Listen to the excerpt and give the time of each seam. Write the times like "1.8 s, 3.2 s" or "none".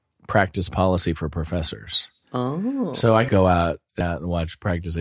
3.3 s, 4.0 s